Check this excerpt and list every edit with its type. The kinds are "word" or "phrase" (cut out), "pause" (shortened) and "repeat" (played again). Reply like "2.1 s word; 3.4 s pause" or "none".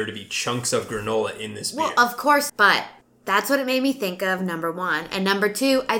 2.5 s word; 3.0 s pause